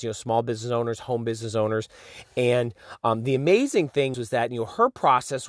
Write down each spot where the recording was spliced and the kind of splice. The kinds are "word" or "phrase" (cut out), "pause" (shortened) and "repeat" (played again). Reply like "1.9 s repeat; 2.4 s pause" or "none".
4.1 s word